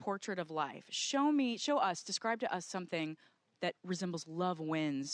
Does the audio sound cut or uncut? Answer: cut